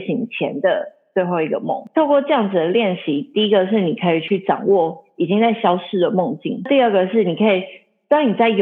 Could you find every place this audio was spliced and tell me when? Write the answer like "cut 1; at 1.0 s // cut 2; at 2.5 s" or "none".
none